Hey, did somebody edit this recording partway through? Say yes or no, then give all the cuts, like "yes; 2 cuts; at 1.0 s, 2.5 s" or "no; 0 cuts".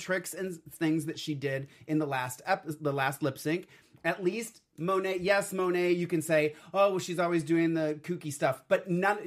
no; 0 cuts